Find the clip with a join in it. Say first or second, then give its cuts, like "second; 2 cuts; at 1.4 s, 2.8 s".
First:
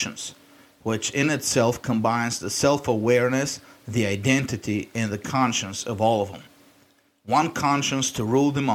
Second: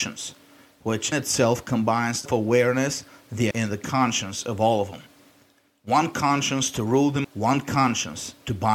second; 4 cuts; at 1.1 s, 2.3 s, 3.5 s, 7.2 s